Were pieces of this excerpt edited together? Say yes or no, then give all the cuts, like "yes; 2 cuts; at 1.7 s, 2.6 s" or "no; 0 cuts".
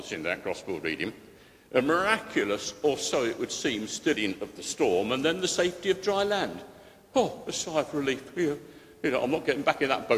no; 0 cuts